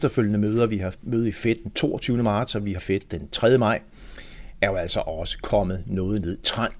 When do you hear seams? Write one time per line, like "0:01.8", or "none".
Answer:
0:02.8